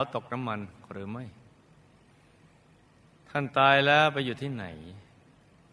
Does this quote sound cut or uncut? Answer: uncut